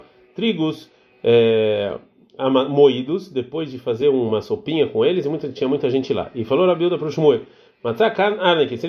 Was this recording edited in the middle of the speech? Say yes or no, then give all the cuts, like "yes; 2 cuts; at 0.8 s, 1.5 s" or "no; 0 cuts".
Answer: no; 0 cuts